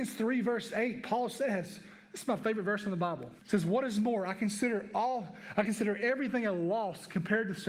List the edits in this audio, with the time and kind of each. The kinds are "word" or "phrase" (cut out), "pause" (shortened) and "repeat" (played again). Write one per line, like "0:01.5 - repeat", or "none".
0:03.4 - pause